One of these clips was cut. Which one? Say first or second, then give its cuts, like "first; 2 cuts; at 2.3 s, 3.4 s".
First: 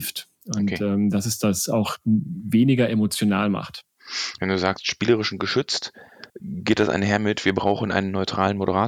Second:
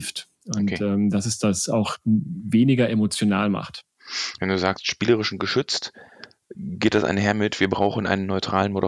first; 1 cut; at 6.3 s